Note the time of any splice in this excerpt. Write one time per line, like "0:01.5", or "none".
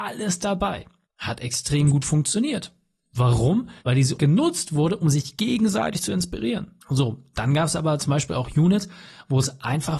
0:01.0
0:03.8
0:04.2
0:06.8